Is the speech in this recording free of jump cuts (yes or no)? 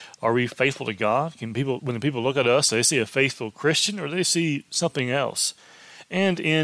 yes